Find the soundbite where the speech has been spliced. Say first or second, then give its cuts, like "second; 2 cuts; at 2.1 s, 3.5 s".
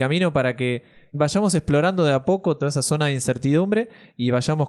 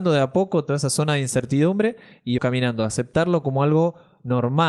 second; 1 cut; at 2.4 s